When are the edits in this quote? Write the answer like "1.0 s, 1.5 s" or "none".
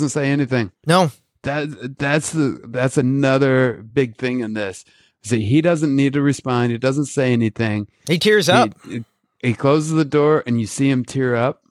none